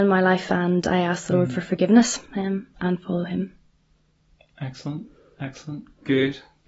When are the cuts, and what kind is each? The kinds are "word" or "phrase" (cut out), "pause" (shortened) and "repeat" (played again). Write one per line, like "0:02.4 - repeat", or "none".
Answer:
none